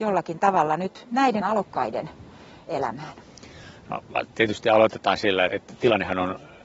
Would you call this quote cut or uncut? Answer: cut